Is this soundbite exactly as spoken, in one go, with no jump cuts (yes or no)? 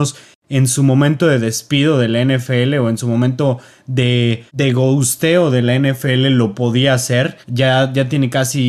no